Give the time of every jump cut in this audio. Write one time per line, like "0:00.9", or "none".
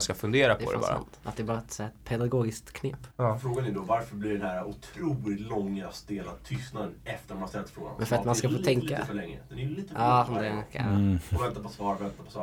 0:03.1